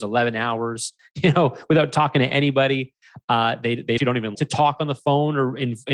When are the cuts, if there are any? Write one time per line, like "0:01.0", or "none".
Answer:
0:04.0
0:04.3